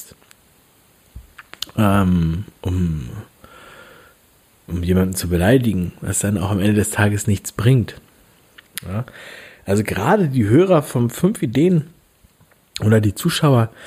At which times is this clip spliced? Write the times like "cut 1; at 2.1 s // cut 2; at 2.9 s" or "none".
none